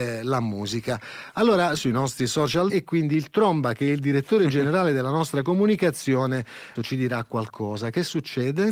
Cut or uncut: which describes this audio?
cut